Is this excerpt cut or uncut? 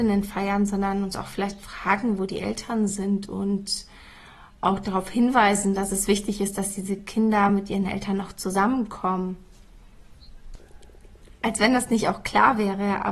uncut